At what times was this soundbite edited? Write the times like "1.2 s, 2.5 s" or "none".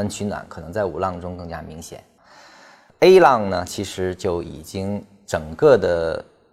none

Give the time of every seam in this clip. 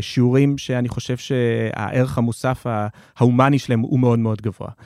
none

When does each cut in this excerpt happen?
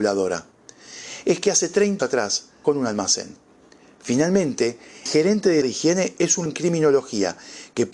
2.0 s, 2.6 s, 5.1 s, 5.6 s, 6.5 s

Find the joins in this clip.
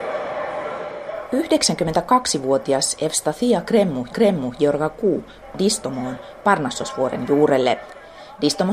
4.1 s, 5.5 s

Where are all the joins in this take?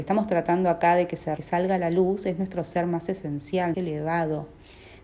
1.4 s, 3.7 s

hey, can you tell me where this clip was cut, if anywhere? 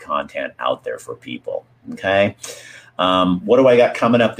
none

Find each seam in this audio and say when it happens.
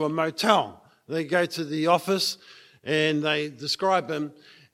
none

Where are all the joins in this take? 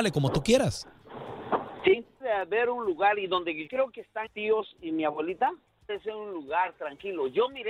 2.2 s, 3.7 s, 4.3 s, 5.9 s

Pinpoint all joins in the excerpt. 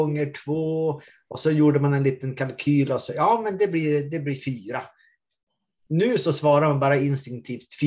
none

